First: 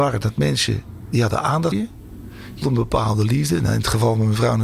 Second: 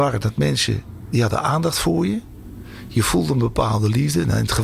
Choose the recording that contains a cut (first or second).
first